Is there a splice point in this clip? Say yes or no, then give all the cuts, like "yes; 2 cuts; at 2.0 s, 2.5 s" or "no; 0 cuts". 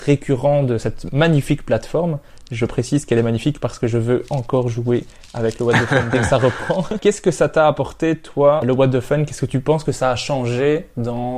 no; 0 cuts